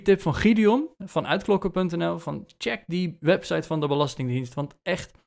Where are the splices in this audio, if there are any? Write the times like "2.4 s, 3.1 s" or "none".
none